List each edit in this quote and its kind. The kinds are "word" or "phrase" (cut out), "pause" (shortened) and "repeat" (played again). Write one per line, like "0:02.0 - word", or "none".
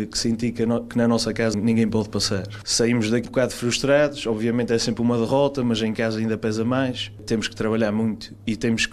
0:01.5 - word
0:03.2 - word